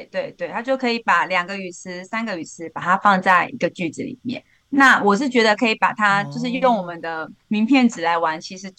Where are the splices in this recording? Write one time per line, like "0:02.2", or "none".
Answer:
none